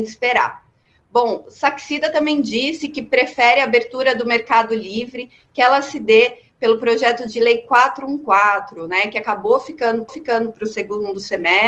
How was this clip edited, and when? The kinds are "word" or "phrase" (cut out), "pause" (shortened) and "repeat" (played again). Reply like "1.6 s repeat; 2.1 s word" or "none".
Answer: 10.1 s repeat